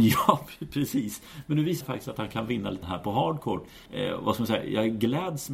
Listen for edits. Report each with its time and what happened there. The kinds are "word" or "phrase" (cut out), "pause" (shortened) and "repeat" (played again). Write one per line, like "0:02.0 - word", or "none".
0:01.8 - word
0:02.8 - word
0:03.9 - pause